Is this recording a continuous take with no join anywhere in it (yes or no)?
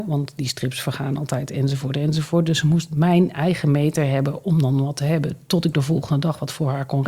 yes